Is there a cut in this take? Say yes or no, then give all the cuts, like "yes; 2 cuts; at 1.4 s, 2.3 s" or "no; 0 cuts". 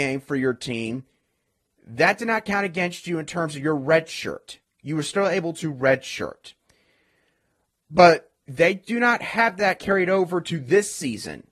no; 0 cuts